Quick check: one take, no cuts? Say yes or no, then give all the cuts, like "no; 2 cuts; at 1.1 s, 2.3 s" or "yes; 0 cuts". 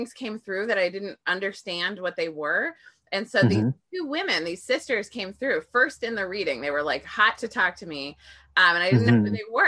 yes; 0 cuts